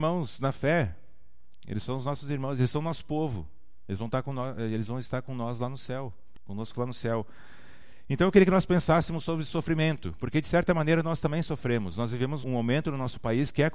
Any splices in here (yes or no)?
yes